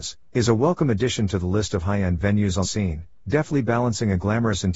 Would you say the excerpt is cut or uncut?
cut